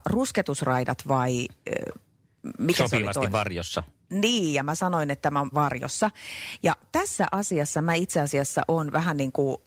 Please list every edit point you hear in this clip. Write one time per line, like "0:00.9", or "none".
0:05.5

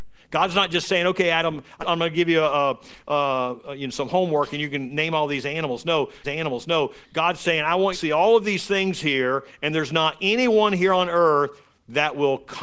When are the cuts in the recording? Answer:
0:01.8
0:06.2
0:07.9

